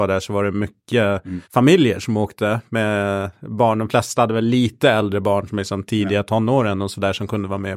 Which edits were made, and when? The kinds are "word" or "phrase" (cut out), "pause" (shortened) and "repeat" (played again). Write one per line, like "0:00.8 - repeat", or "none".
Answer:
0:01.4 - pause